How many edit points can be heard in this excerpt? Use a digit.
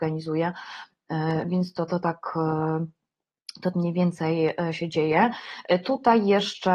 2